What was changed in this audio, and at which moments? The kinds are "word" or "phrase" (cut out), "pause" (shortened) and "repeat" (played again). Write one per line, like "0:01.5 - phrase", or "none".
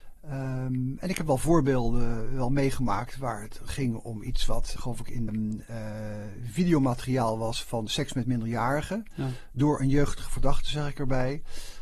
0:04.8 - word
0:05.3 - phrase